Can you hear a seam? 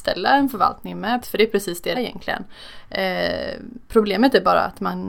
yes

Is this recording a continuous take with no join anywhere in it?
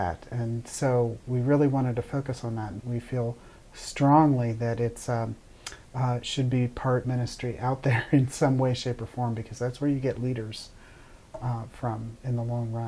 no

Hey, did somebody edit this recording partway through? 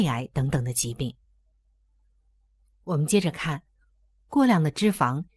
no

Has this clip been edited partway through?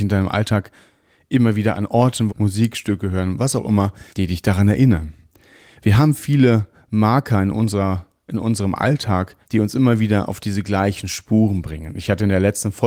yes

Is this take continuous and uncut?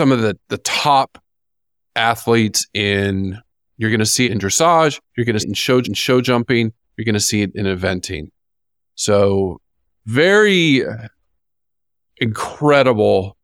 no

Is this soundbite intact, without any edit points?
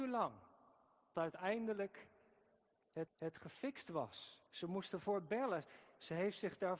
no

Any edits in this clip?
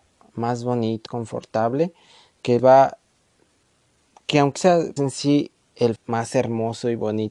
yes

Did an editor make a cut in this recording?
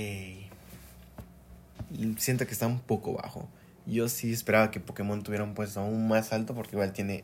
yes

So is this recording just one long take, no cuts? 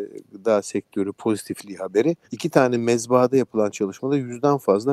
no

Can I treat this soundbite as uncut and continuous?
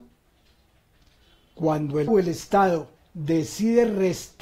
no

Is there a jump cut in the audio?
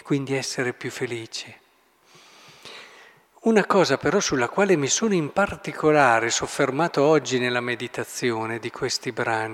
no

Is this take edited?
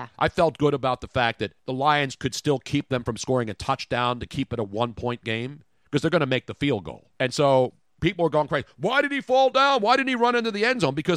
yes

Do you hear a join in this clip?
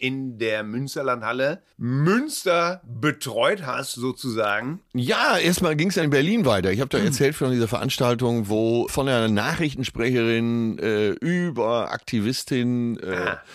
yes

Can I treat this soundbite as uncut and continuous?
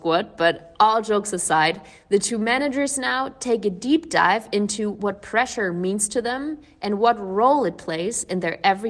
yes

